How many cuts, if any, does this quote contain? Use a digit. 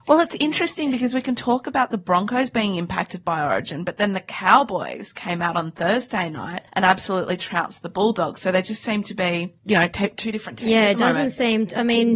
2